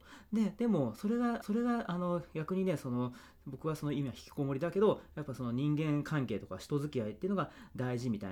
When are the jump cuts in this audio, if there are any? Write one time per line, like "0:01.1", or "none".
0:01.4